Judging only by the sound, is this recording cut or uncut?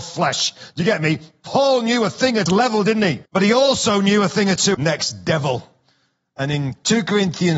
cut